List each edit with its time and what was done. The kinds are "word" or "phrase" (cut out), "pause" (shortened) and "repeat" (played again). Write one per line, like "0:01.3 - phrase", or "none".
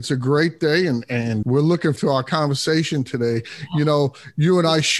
0:01.4 - word
0:02.0 - word